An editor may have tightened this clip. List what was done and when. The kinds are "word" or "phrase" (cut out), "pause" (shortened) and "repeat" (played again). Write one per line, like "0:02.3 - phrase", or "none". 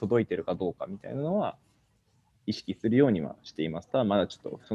none